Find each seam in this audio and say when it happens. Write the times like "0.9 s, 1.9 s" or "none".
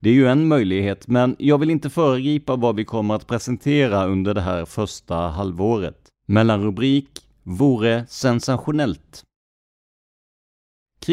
6.2 s